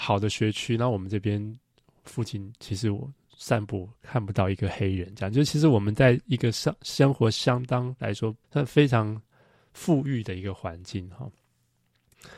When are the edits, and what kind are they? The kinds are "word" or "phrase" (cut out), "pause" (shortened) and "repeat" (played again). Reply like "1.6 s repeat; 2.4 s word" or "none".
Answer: 8.4 s pause